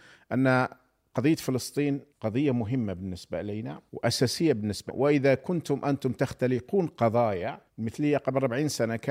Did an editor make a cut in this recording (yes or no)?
yes